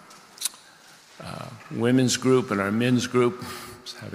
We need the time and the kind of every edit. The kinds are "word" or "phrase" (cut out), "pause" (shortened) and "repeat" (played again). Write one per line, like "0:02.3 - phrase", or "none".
none